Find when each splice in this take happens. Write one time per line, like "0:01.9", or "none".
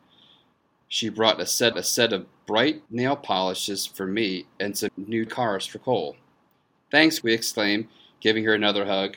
0:01.7
0:02.9
0:04.9
0:05.3
0:07.2